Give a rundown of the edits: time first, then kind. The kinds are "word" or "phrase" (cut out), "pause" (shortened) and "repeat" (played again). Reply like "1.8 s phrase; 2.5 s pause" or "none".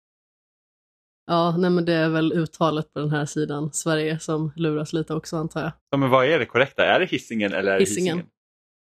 5.8 s pause